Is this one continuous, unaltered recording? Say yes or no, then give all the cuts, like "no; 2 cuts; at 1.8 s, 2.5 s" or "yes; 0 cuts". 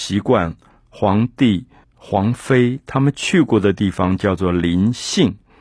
no; 1 cut; at 1.8 s